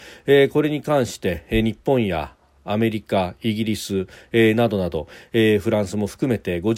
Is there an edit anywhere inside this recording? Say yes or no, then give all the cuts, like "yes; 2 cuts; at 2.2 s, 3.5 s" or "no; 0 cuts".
no; 0 cuts